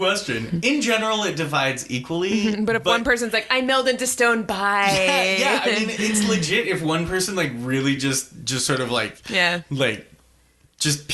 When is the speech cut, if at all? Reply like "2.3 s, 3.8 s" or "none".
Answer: none